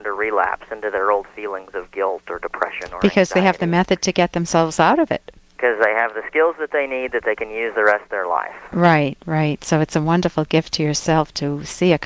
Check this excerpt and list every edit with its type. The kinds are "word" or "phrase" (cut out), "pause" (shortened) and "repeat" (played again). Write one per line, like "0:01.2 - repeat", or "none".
none